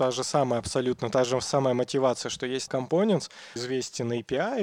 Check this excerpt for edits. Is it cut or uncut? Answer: cut